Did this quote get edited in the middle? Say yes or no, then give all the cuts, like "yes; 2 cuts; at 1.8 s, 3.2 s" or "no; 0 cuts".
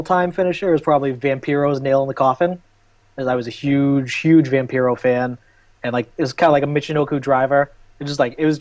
no; 0 cuts